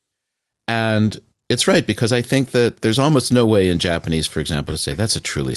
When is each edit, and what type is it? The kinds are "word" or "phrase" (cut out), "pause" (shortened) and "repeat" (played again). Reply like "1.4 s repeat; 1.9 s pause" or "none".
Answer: none